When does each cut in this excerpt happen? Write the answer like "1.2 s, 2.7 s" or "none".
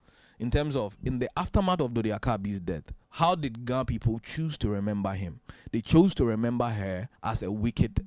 3.0 s, 7.2 s